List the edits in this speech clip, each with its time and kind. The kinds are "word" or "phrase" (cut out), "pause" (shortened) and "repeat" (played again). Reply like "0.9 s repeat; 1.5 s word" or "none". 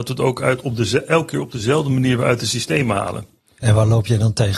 none